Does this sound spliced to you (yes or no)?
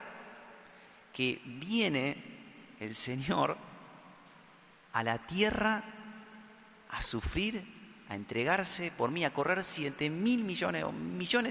no